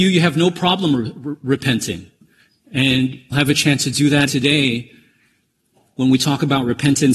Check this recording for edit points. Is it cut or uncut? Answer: cut